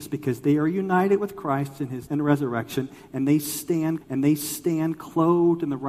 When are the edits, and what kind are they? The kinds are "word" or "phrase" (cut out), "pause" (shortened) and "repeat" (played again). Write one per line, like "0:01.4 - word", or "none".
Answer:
0:02.1 - word
0:04.0 - repeat